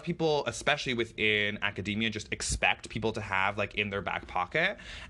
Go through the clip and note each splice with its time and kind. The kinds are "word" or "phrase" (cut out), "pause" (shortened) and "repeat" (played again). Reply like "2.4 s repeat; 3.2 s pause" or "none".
none